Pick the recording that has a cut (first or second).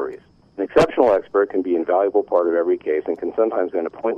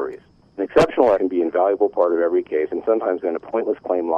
second